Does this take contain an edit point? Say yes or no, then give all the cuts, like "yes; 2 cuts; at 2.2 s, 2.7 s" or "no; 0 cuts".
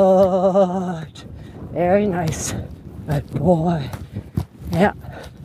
no; 0 cuts